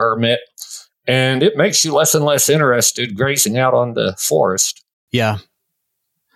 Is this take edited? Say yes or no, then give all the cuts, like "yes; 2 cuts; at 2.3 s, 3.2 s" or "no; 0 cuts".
no; 0 cuts